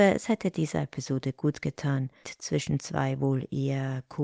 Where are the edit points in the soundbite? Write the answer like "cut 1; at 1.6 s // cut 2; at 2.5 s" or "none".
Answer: cut 1; at 2.2 s